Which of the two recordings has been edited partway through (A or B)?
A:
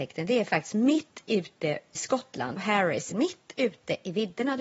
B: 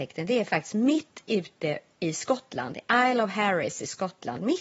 A